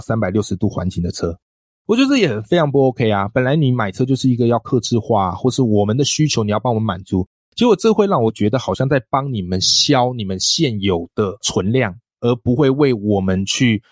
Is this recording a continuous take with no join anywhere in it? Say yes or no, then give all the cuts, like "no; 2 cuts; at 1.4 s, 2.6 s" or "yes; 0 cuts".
yes; 0 cuts